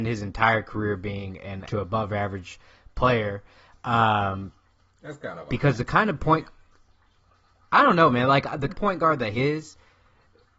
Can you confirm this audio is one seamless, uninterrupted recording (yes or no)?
no